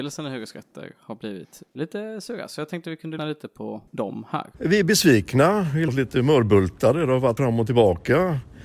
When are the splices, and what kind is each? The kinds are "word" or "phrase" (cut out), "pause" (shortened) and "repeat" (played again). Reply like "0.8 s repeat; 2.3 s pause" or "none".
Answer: 3.2 s word; 3.9 s pause; 4.5 s pause; 5.9 s phrase; 7.4 s word